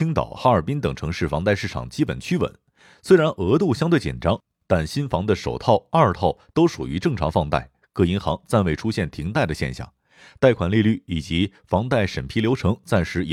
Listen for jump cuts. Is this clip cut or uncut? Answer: uncut